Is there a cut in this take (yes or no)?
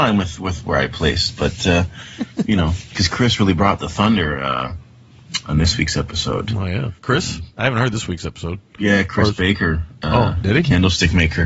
yes